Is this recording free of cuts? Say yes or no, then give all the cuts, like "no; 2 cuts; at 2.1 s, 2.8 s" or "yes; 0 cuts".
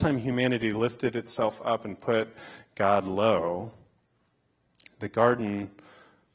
yes; 0 cuts